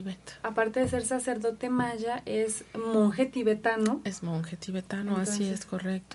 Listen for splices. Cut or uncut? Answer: uncut